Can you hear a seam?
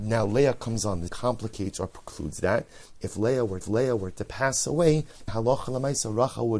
yes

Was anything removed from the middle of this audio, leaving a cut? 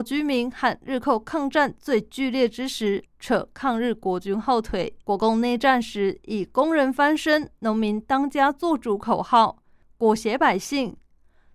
yes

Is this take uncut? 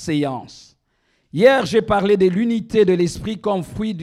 yes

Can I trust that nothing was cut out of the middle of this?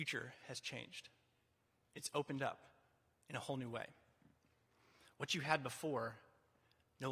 yes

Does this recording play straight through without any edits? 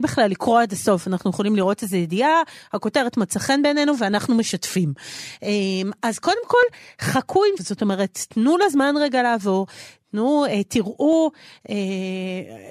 no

